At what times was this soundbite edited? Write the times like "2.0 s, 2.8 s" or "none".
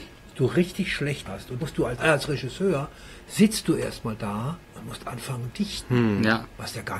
1.3 s, 1.6 s, 2.0 s, 4.6 s, 5.5 s